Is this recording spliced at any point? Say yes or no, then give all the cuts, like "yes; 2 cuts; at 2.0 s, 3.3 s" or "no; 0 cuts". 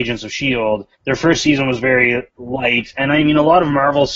yes; 2 cuts; at 0.9 s, 2.3 s